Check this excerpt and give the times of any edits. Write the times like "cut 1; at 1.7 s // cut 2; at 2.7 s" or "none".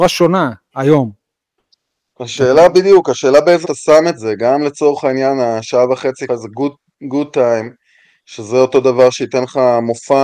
cut 1; at 3.6 s // cut 2; at 6.3 s